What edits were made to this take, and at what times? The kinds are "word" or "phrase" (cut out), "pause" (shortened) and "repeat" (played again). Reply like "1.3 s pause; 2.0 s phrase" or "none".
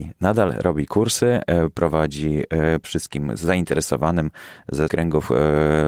2.8 s word; 4.9 s word